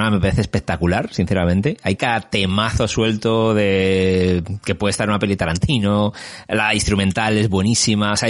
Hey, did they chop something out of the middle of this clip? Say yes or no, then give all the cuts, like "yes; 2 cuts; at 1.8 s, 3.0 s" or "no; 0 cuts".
no; 0 cuts